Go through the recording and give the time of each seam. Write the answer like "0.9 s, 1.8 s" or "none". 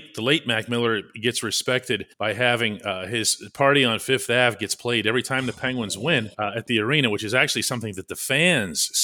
2.1 s, 6.3 s

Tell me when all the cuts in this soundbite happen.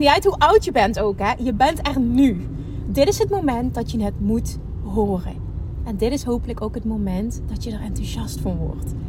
none

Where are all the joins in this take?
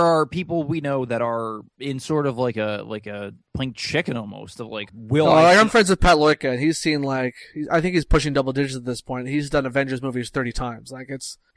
1.7 s, 4.9 s

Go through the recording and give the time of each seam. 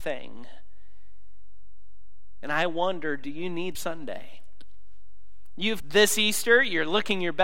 3.7 s, 5.8 s

